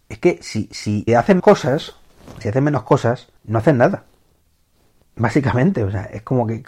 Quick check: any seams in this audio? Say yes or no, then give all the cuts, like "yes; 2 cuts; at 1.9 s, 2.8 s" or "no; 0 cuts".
yes; 5 cuts; at 1.1 s, 1.4 s, 2.4 s, 3.4 s, 4.4 s